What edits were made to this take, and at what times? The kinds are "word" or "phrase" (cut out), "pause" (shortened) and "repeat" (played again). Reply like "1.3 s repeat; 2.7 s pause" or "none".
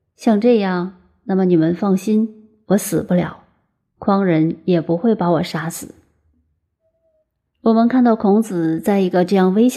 none